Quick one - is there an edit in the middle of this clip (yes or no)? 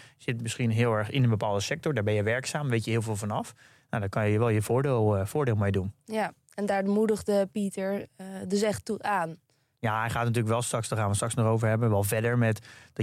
no